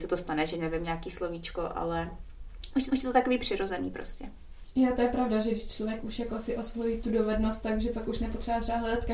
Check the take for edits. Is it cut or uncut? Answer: cut